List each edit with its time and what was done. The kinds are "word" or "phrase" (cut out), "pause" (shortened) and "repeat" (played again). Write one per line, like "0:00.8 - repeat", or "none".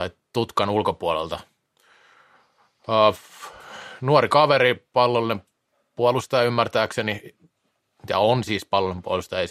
none